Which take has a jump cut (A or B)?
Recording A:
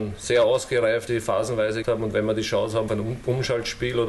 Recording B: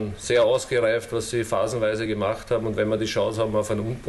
A